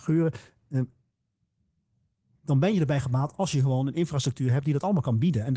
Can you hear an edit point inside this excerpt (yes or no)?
no